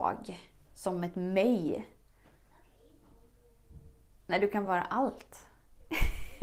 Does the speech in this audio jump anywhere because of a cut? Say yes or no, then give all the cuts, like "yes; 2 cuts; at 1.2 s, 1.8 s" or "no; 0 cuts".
no; 0 cuts